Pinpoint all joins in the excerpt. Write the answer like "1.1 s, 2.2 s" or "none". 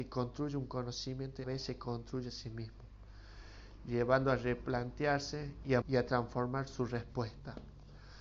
1.4 s, 5.8 s